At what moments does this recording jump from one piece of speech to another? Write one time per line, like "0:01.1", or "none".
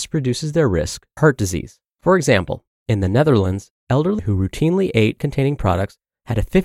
0:01.2
0:01.9
0:04.2
0:05.2

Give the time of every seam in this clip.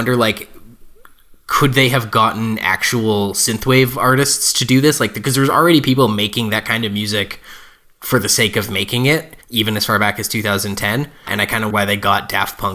0:09.4
0:11.3
0:11.7

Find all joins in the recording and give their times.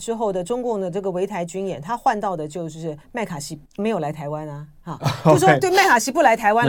0:03.0
0:03.7

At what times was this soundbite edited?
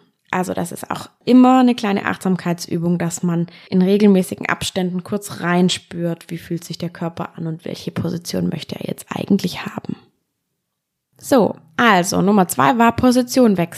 none

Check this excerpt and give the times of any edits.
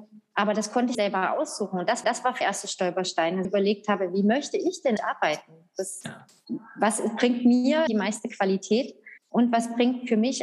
0:00.9
0:02.0
0:02.4
0:03.4
0:05.0
0:07.9
0:09.2

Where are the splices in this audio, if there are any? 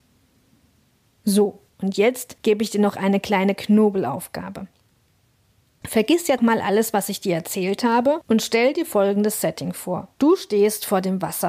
0:06.4

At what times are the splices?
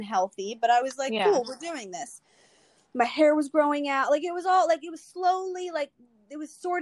none

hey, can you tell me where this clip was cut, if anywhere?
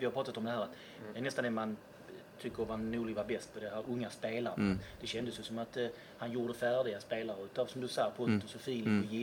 none

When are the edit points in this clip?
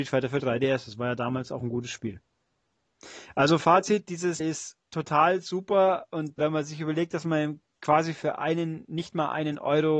0:04.4
0:04.9
0:06.4
0:07.7

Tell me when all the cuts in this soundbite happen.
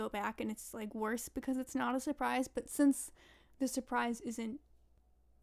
none

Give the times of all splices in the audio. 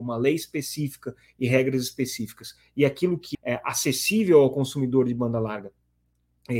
0:03.3

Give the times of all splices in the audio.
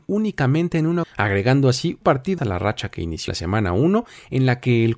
0:01.0
0:02.0
0:02.4
0:03.3

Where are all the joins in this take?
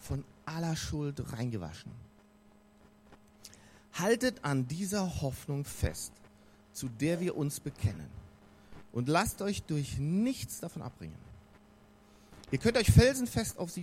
none

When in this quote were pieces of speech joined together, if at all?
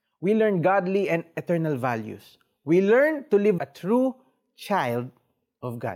0:03.6

